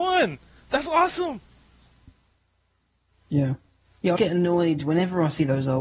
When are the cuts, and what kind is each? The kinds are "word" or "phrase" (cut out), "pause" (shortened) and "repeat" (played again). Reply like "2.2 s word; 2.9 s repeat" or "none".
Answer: 4.2 s word

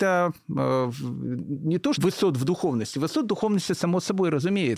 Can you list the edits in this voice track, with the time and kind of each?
1.9 s word

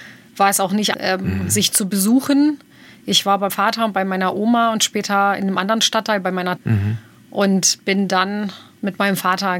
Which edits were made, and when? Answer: 0.9 s word; 3.5 s word; 6.6 s word

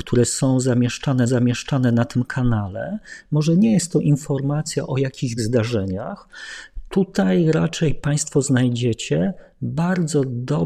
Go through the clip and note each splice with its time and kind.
1.3 s repeat; 5.4 s word

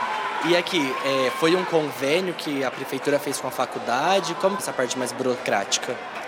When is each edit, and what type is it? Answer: 4.6 s word

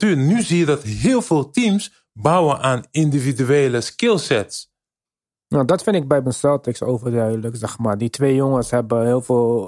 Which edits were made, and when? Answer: 6.3 s word

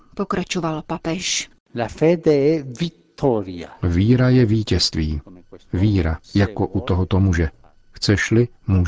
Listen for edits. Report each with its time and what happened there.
6.2 s pause

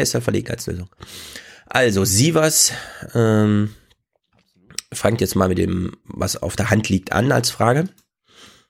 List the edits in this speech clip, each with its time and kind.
none

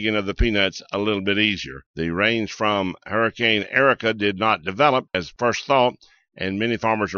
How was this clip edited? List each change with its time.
1.9 s pause

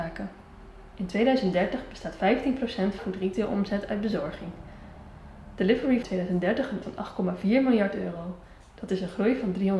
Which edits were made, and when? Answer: 3.0 s phrase; 6.0 s phrase; 6.8 s word

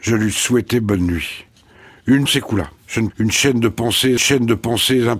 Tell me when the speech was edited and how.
2.3 s word; 2.8 s pause; 3.1 s phrase; 4.2 s repeat

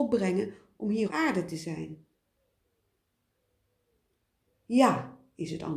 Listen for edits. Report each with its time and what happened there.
1.1 s word

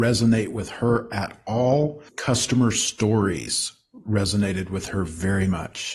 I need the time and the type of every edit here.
2.1 s pause

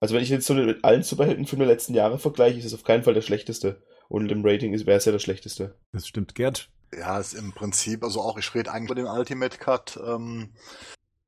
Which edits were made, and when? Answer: 4.3 s word; 8.9 s phrase

